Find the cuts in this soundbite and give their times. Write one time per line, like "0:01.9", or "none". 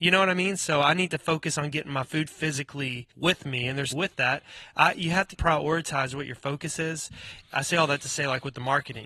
0:02.3
0:03.1
0:03.9
0:05.4
0:07.4